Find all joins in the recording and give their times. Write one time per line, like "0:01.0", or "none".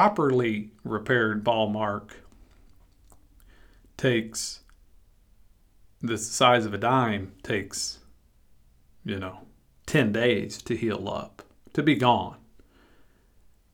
none